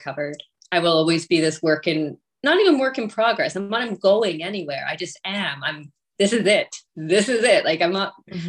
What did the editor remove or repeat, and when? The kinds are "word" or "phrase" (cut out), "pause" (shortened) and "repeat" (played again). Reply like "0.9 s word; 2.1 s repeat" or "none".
6.9 s pause